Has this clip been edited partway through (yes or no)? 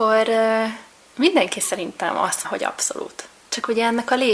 yes